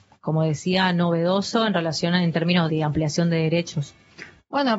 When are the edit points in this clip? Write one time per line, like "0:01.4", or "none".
0:02.7